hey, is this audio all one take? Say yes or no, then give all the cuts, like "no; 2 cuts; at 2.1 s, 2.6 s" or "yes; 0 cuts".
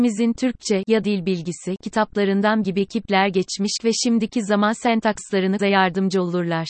no; 4 cuts; at 1.0 s, 2.6 s, 3.8 s, 5.6 s